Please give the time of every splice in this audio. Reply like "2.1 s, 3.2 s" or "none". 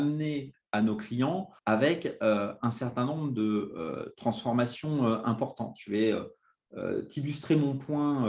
1.6 s